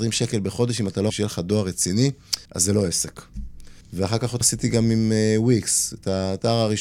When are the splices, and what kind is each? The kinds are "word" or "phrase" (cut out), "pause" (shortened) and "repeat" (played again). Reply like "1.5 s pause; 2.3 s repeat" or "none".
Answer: 1.1 s phrase; 2.5 s pause; 3.8 s pause; 4.4 s word